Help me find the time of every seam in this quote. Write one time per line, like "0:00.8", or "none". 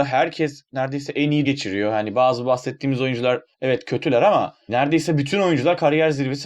0:01.4
0:03.5
0:04.7